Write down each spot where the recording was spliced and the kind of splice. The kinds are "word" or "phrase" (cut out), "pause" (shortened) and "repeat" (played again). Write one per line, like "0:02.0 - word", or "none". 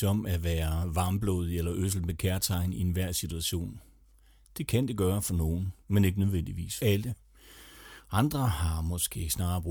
0:05.8 - pause
0:06.8 - word